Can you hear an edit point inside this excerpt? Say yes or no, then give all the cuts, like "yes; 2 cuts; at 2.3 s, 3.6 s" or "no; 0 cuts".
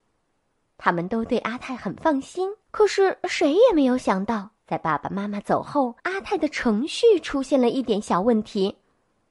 yes; 3 cuts; at 2.6 s, 4.6 s, 6.0 s